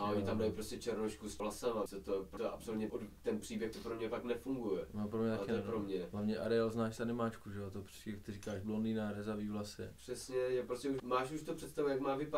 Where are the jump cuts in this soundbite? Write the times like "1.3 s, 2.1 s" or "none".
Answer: 1.4 s, 1.9 s, 2.4 s, 2.9 s, 3.7 s, 11.0 s